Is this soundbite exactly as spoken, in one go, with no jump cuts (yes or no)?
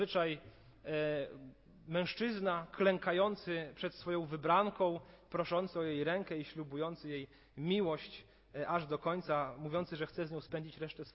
yes